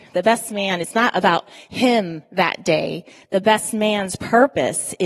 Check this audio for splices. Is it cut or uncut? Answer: uncut